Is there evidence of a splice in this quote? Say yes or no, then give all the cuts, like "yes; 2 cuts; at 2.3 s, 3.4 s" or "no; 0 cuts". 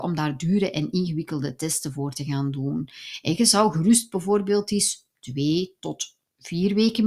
no; 0 cuts